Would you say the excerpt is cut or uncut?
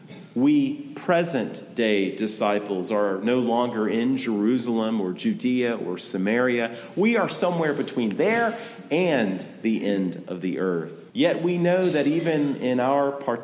cut